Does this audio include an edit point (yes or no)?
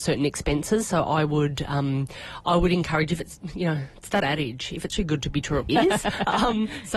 yes